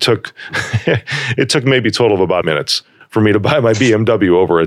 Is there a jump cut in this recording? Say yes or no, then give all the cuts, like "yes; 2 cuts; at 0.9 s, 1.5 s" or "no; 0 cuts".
yes; 1 cut; at 2.4 s